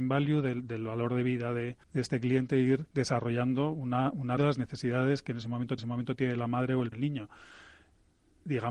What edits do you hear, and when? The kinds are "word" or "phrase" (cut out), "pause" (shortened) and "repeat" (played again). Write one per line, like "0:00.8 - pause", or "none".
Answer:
0:01.8 - pause
0:02.9 - pause
0:04.4 - phrase
0:05.8 - repeat
0:06.9 - phrase